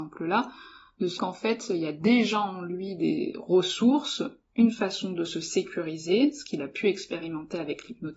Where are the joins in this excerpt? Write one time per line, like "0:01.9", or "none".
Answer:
0:01.2